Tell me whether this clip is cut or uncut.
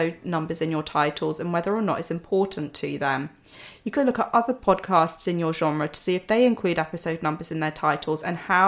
cut